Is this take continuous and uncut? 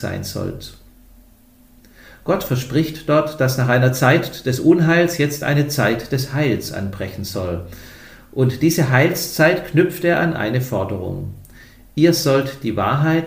yes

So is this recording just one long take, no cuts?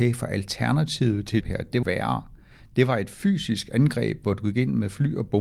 no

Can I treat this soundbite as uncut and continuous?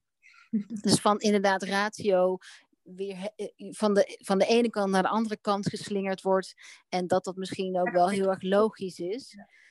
yes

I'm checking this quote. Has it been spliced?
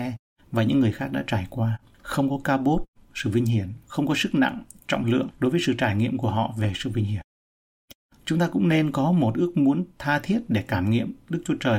no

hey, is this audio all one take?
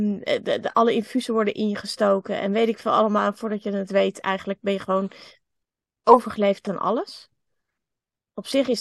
no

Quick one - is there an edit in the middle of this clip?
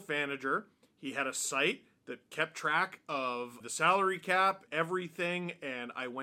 yes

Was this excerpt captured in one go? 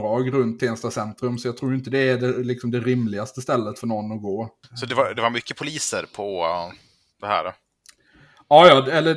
yes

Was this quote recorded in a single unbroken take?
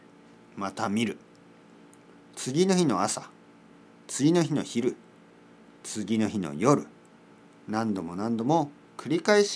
yes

